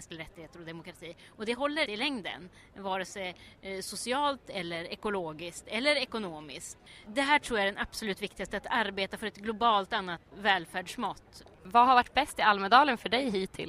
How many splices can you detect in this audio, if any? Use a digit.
3